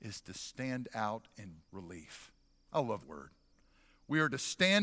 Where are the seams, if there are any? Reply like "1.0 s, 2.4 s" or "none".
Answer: 1.6 s, 3.0 s